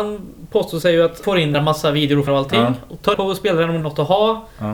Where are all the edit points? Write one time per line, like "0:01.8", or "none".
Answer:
0:01.2
0:01.5
0:02.3
0:03.1
0:03.8